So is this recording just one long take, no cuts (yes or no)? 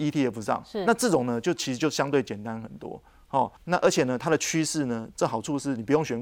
no